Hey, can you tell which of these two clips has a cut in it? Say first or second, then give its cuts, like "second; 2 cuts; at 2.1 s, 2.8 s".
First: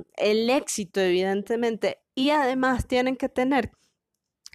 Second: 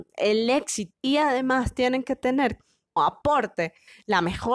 second; 2 cuts; at 0.9 s, 3.0 s